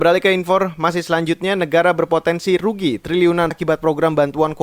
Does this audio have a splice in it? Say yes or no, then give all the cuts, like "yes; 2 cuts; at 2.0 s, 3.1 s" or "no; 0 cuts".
yes; 1 cut; at 3.5 s